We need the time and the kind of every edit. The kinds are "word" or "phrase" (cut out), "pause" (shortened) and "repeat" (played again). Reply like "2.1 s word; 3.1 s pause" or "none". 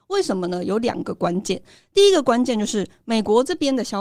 none